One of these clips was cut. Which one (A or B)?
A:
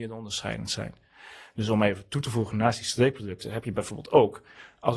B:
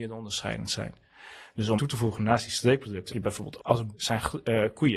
B